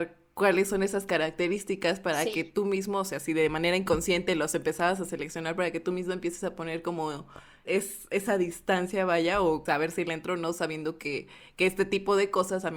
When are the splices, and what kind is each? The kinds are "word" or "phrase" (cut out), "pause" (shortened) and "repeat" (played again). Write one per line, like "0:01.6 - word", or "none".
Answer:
0:07.7 - word
0:09.7 - phrase

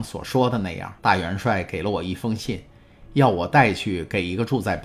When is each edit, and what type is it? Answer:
0:01.0 - pause

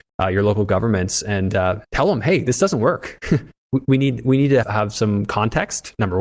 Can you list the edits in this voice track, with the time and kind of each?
0:01.8 - pause
0:04.6 - word

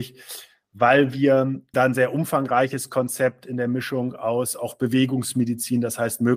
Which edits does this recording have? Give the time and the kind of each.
0:01.7 - word

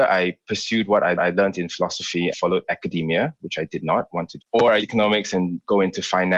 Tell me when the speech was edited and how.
0:01.2 - repeat
0:02.3 - word
0:04.4 - word
0:04.8 - word

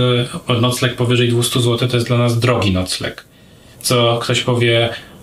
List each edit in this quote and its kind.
none

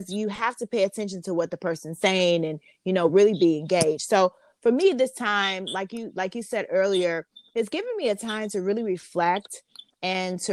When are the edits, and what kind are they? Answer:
none

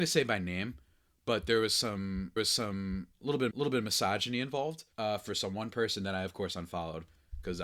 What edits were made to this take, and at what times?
0:02.4 - repeat
0:03.5 - repeat
0:04.9 - pause

